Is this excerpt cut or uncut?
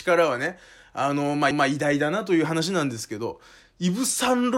cut